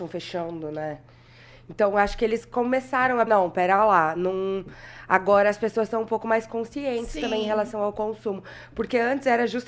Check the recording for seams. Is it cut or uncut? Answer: cut